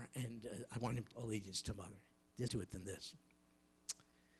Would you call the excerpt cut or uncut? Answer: cut